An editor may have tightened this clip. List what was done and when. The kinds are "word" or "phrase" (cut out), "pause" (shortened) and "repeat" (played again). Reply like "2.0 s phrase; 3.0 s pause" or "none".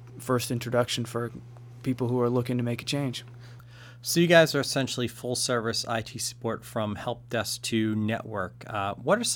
none